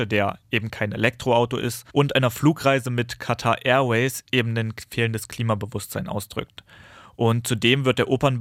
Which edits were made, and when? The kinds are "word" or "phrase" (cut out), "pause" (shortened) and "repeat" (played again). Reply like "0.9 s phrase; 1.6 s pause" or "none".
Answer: 1.9 s pause

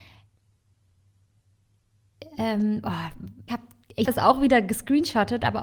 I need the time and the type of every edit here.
3.5 s word; 4.0 s word

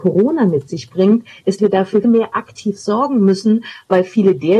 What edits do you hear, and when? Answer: 1.6 s word; 2.0 s word

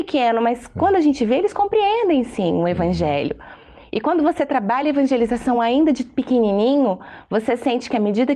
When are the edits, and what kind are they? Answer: none

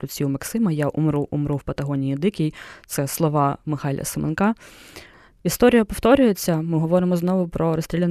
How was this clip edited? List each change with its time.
none

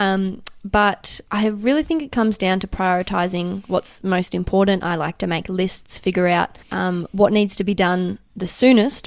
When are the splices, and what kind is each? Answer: 1.3 s pause; 6.6 s pause

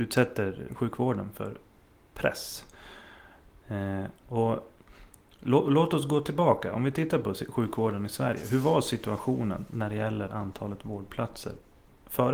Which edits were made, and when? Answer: none

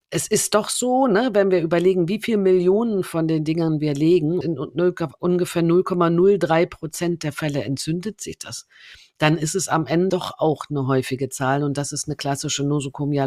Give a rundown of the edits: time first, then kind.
4.4 s word; 10.1 s word

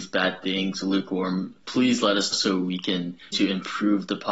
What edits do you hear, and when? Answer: 1.6 s word; 2.3 s word; 3.3 s word

